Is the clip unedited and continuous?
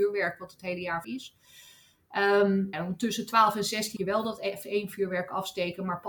no; 3 cuts; at 1.0 s, 2.7 s, 4.0 s

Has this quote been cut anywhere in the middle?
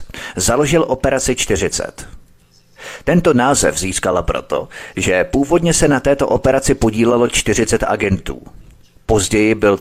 no; 0 cuts

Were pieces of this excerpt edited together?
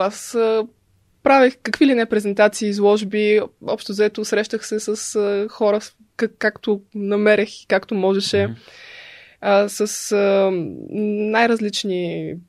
no; 0 cuts

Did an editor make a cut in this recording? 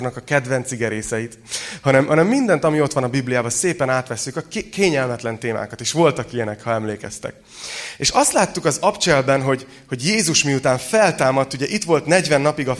no; 0 cuts

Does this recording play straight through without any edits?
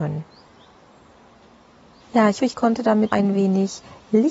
no; 2 cuts; at 2.4 s, 3.1 s

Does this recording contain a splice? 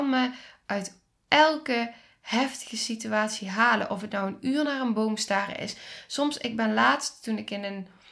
no; 0 cuts

